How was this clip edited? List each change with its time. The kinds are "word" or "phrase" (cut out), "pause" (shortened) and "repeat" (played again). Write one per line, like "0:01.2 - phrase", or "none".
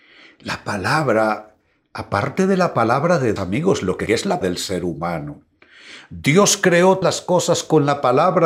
0:03.4 - word
0:04.1 - word
0:04.4 - word
0:07.0 - word